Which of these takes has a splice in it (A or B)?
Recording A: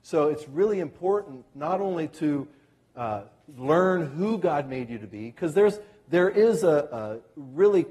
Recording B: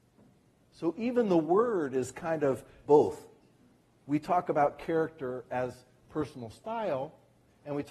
B